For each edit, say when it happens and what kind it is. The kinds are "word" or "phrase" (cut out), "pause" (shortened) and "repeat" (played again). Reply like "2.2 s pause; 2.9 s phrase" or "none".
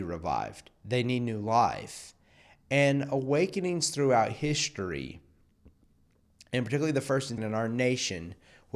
7.4 s word

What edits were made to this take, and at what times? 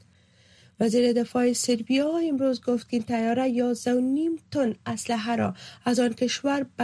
none

